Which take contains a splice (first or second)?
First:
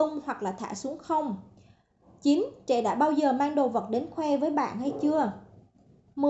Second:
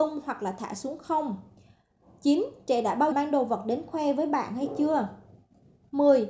second